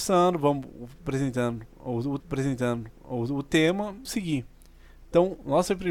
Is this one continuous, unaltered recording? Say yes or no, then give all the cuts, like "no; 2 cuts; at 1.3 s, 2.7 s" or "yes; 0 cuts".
no; 2 cuts; at 2.2 s, 4.0 s